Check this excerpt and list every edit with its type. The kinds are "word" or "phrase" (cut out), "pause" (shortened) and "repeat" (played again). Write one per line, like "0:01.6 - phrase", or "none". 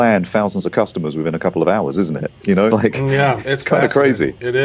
0:02.7 - word
0:03.4 - word